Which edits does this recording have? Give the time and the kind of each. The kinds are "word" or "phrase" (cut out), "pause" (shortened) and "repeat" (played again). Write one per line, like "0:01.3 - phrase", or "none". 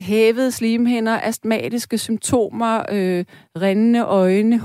none